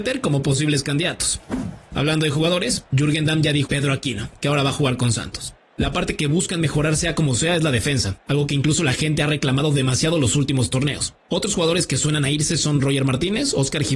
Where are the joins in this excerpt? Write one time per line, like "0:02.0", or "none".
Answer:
0:03.7
0:11.2